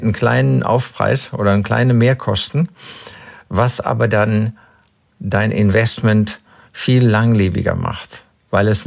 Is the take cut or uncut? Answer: uncut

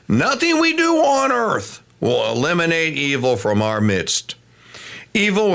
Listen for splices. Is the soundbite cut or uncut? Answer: uncut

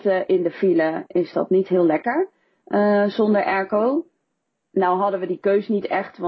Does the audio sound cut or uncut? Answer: uncut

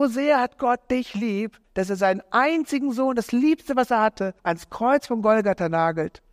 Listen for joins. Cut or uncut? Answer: cut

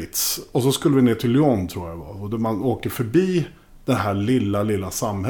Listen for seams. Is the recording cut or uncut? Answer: uncut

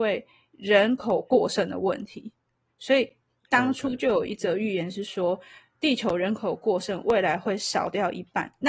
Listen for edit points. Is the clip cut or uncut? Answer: uncut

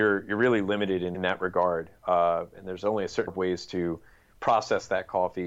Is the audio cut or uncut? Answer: cut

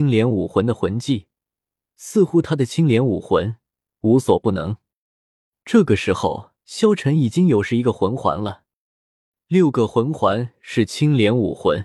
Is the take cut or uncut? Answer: cut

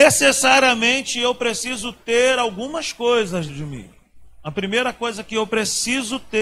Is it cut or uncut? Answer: cut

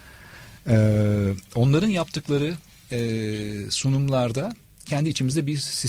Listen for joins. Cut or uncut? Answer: uncut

